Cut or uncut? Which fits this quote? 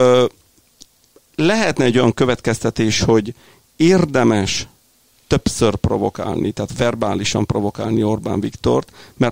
uncut